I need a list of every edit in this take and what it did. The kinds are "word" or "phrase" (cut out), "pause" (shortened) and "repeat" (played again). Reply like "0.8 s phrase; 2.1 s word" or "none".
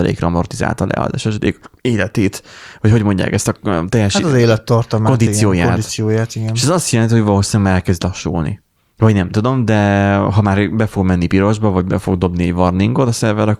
1.8 s pause; 8.8 s pause